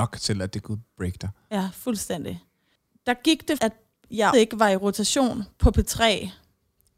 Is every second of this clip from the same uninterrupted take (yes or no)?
no